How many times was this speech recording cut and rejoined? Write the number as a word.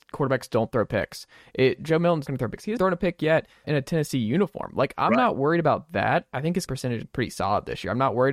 five